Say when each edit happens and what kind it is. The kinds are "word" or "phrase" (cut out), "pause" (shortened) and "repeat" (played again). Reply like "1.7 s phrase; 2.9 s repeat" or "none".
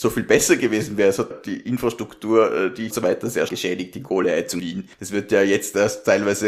1.3 s word; 2.9 s phrase; 3.5 s word; 4.6 s word; 4.9 s pause